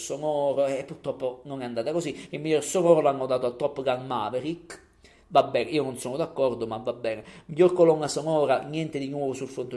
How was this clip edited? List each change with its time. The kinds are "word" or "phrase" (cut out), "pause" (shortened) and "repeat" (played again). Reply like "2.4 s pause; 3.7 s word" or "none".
none

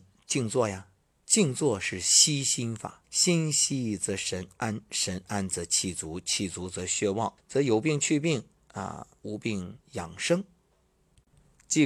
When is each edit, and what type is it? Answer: 3.0 s pause; 7.4 s phrase; 9.8 s pause

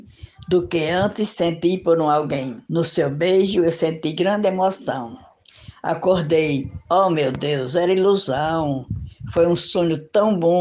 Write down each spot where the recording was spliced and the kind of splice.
2.6 s pause

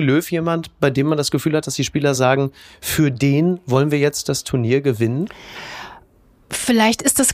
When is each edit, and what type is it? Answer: none

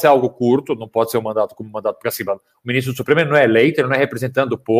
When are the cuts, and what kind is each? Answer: none

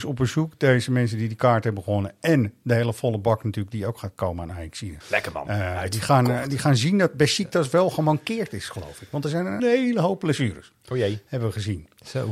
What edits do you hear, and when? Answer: 5.0 s pause; 9.6 s word

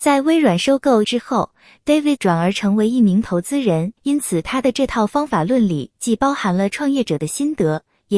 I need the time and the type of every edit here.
1.0 s word; 2.2 s word; 4.0 s pause

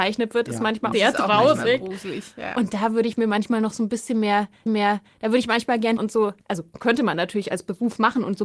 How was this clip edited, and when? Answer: 0.9 s phrase; 4.7 s repeat; 6.0 s word; 6.4 s pause

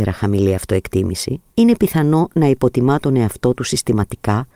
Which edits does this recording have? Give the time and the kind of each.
1.5 s pause

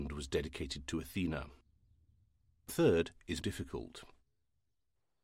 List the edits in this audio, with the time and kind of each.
2.7 s word; 3.4 s word

